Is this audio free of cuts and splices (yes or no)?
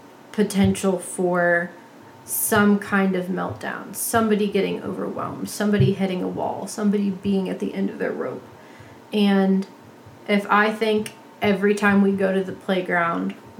yes